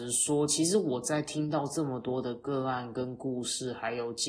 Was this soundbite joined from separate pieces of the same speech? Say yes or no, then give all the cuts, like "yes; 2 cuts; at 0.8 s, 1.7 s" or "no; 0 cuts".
no; 0 cuts